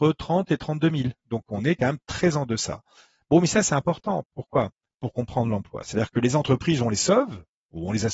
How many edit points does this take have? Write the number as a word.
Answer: zero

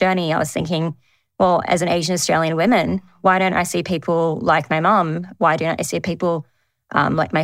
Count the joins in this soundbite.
zero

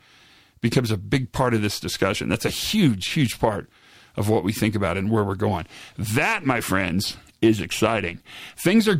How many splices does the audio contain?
zero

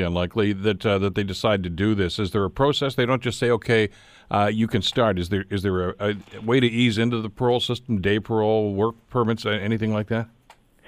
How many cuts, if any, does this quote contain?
zero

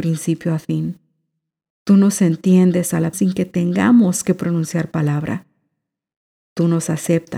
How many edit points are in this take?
one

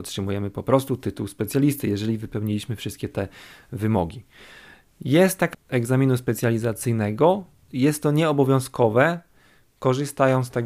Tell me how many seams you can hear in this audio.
two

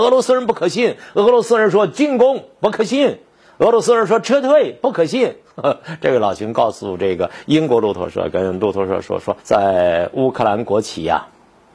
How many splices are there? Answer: one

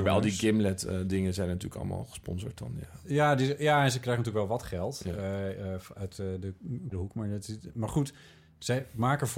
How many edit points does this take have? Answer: three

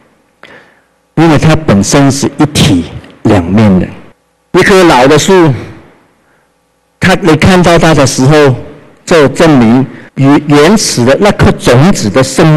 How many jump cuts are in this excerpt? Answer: two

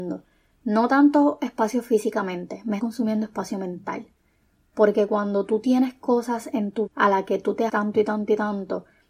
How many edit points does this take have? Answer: three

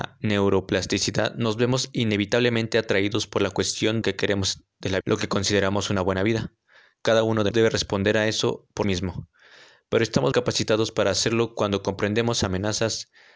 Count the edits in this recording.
five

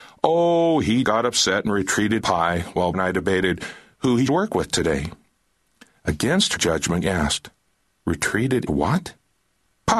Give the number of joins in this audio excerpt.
seven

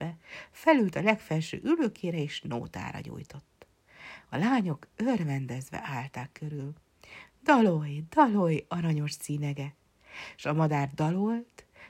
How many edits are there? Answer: zero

